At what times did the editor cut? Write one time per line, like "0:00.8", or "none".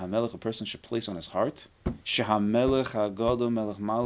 0:02.0